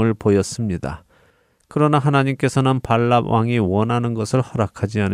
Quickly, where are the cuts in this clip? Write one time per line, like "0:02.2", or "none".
none